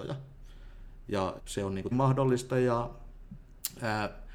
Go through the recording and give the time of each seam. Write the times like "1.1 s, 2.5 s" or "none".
1.4 s, 1.9 s